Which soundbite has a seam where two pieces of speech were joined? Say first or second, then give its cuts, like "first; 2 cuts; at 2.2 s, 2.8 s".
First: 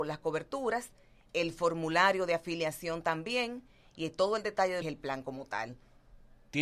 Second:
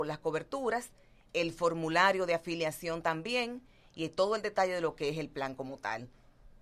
first; 1 cut; at 4.8 s